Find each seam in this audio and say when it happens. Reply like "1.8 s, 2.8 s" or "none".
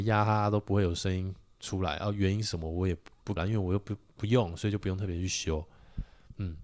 3.4 s